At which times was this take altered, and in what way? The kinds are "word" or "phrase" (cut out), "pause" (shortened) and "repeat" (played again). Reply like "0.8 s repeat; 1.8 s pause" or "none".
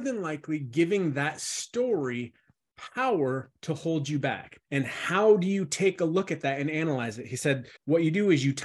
4.6 s pause; 7.8 s pause